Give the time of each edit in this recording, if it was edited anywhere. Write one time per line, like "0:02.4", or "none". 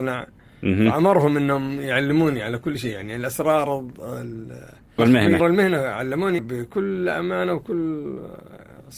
0:05.0
0:05.4
0:06.4